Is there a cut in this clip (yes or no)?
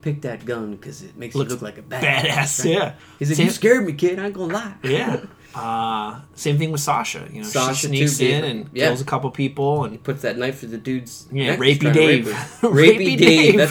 yes